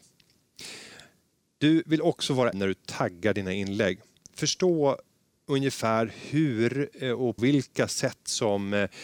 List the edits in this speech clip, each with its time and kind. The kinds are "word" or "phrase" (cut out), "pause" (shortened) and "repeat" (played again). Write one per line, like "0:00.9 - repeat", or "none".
0:02.5 - word
0:07.4 - word